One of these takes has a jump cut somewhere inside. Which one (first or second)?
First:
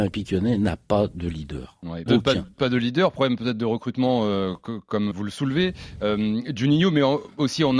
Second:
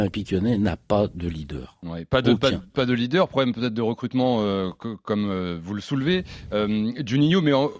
first